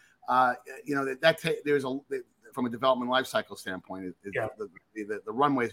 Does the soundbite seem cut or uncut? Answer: cut